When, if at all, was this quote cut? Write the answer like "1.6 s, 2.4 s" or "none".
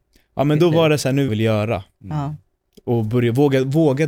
1.3 s, 2.6 s

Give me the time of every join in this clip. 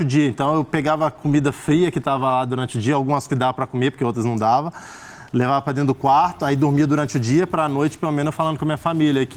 3.3 s, 8.3 s

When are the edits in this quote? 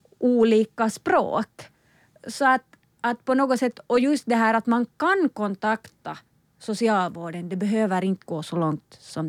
none

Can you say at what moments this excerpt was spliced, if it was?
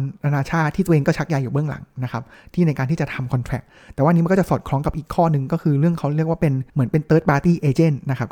6.7 s

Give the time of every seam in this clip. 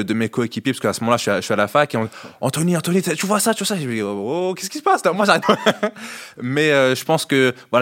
5.4 s

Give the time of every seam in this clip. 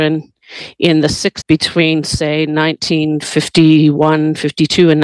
1.4 s

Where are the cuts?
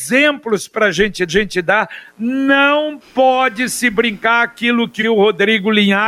1.3 s, 5.0 s

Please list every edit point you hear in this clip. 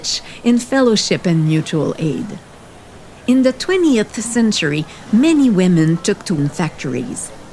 6.4 s

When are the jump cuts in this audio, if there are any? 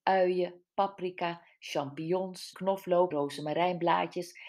2.5 s, 3.1 s

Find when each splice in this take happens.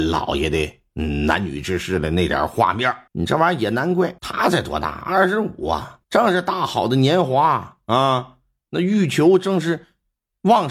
3.1 s, 4.2 s, 6.0 s

